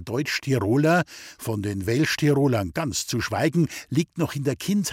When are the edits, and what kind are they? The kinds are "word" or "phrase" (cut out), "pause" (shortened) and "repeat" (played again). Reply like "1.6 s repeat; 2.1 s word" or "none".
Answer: none